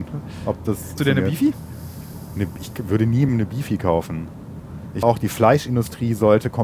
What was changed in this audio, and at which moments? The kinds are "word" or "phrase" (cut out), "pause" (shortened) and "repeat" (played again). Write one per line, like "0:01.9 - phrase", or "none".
0:01.0 - word
0:03.3 - word
0:05.0 - word